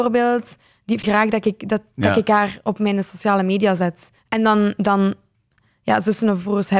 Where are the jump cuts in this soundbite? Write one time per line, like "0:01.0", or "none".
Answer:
0:01.0
0:04.2